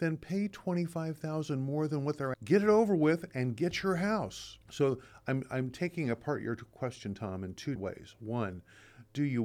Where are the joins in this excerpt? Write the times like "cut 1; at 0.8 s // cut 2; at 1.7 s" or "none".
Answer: cut 1; at 2.3 s // cut 2; at 4.6 s // cut 3; at 7.8 s